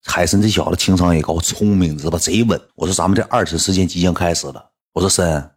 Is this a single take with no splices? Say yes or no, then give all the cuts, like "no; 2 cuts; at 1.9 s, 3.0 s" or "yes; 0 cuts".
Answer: no; 1 cut; at 2.7 s